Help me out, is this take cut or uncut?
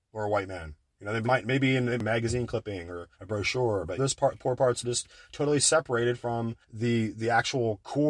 cut